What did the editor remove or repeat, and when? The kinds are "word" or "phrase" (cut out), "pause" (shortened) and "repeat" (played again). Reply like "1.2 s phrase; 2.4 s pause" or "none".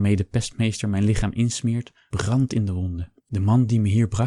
3.2 s pause